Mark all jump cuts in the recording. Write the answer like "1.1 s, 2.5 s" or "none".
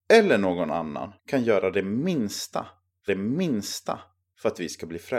1.2 s, 3.1 s